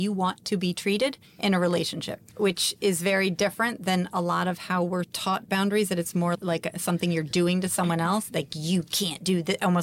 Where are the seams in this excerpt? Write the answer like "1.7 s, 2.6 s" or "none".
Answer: 2.3 s